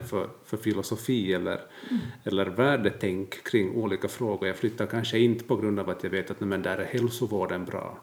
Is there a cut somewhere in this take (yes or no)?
no